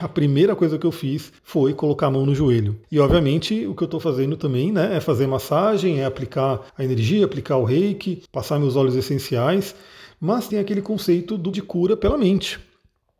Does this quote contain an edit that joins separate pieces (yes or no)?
yes